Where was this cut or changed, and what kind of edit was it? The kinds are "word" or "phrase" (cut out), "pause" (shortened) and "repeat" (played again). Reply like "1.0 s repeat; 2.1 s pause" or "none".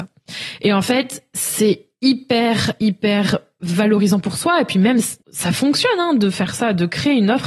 5.2 s pause